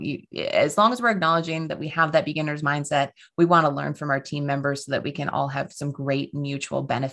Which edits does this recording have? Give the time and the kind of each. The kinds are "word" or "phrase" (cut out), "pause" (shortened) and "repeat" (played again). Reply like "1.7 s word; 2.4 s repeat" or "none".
none